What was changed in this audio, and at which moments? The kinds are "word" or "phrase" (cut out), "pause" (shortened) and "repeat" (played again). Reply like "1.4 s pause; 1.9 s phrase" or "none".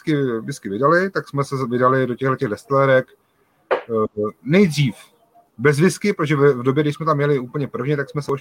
none